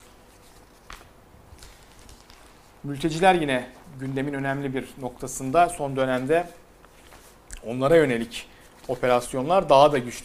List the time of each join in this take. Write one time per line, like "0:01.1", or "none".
none